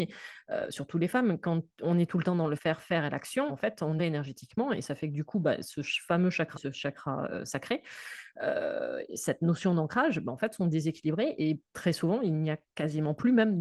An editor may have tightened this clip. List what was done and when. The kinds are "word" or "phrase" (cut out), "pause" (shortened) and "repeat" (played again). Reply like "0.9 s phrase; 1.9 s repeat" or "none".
2.6 s word; 3.5 s word; 4.0 s phrase; 6.5 s word; 11.7 s pause